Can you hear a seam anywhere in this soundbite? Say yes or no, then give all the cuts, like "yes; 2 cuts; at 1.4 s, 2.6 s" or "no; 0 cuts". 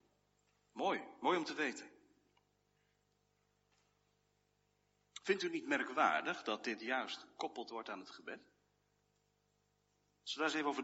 no; 0 cuts